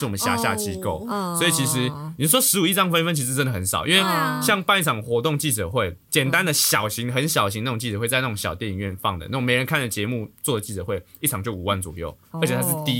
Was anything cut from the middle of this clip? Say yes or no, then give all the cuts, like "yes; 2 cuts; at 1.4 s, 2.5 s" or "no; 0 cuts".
yes; 1 cut; at 6.0 s